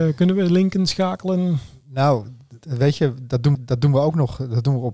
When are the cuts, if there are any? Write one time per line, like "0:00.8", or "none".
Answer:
0:03.5